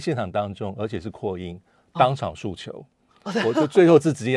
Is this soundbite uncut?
yes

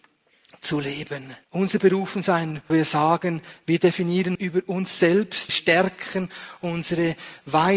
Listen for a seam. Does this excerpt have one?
yes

